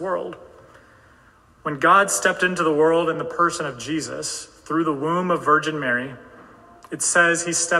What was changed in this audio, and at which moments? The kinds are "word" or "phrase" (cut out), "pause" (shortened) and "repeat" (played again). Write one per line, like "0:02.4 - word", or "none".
none

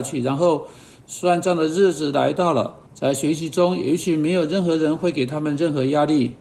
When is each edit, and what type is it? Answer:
0:02.9 - pause

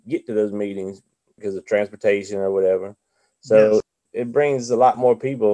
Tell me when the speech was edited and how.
none

